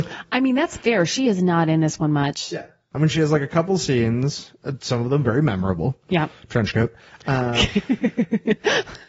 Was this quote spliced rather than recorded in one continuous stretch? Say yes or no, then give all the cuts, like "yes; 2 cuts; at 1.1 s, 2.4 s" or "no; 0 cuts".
no; 0 cuts